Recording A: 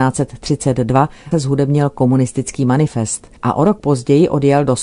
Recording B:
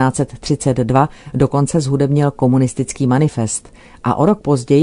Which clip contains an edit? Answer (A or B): A